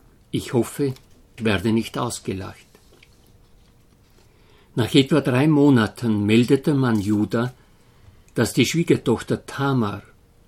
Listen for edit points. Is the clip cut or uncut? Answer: cut